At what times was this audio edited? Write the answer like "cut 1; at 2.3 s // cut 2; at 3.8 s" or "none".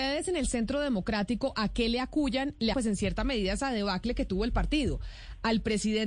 cut 1; at 2.7 s